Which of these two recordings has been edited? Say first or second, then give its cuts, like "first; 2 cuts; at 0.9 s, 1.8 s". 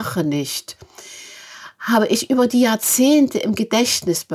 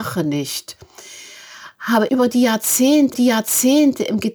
second; 2 cuts; at 2.1 s, 3.1 s